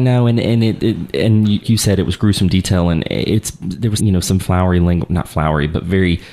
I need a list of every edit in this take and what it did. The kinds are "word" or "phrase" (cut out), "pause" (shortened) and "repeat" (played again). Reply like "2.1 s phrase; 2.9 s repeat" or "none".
1.6 s word; 4.0 s word; 4.4 s word